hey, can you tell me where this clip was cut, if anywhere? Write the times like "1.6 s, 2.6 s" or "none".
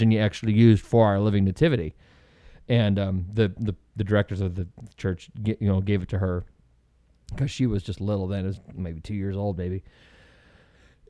none